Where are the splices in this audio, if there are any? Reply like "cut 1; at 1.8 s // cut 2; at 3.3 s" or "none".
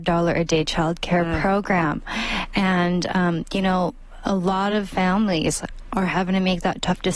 none